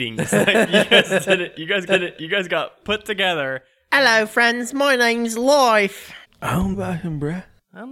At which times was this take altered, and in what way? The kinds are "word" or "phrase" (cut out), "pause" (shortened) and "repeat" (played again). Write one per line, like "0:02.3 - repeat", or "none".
0:01.9 - repeat
0:06.2 - pause
0:06.7 - word